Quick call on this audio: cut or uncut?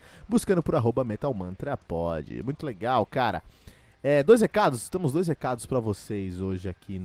uncut